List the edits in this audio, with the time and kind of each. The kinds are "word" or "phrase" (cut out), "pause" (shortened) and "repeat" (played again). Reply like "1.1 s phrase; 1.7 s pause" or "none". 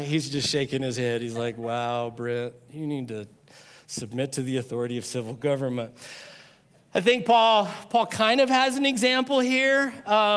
none